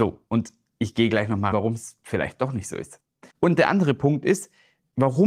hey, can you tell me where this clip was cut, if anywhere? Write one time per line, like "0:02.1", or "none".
0:01.5
0:03.3